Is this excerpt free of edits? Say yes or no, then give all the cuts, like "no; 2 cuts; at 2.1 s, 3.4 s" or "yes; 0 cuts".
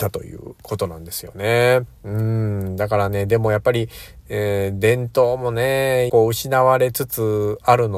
no; 1 cut; at 6.1 s